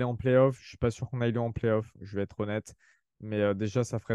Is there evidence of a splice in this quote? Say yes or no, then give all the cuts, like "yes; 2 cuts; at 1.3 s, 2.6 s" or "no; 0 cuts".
no; 0 cuts